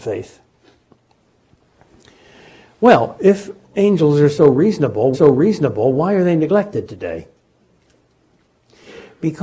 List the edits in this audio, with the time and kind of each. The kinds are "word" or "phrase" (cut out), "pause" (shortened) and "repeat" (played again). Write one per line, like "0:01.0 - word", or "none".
0:05.1 - repeat